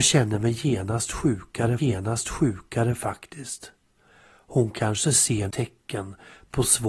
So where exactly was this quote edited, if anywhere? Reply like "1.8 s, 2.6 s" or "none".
1.8 s, 5.5 s